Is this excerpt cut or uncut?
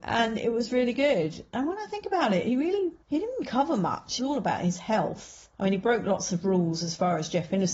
cut